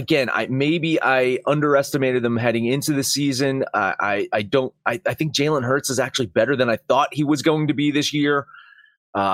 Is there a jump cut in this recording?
no; 0 cuts

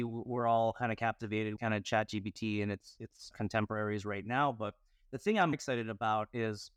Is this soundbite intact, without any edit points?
no; 4 cuts; at 1.6 s, 3.0 s, 3.3 s, 5.5 s

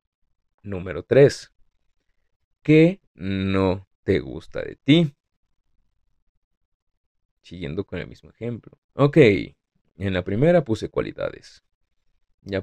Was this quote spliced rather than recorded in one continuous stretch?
yes; 1 cut; at 8.8 s

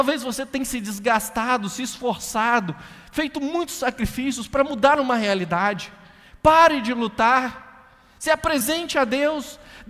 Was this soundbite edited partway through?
no; 0 cuts

